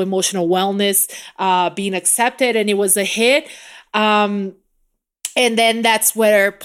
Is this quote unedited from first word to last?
yes; 0 cuts

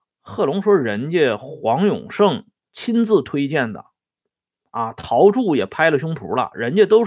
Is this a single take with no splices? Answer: yes; 0 cuts

